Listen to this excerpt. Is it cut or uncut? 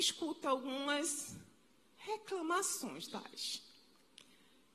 cut